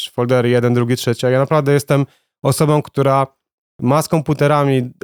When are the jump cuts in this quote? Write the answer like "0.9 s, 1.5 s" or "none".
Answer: none